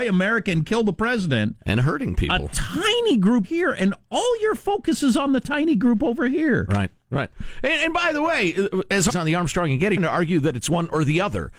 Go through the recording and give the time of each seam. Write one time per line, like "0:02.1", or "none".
0:03.4
0:09.1
0:10.0